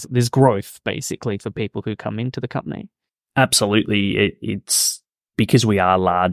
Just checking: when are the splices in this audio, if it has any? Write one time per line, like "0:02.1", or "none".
none